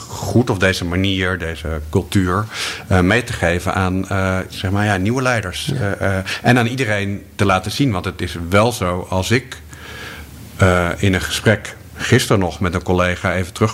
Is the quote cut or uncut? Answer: uncut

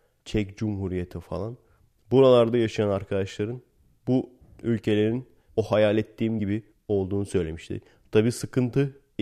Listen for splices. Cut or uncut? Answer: uncut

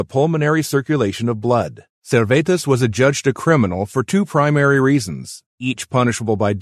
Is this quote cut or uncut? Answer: cut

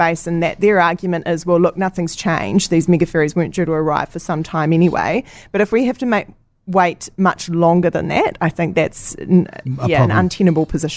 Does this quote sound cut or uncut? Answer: uncut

